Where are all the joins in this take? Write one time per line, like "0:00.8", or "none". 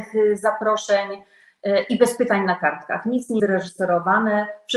0:03.4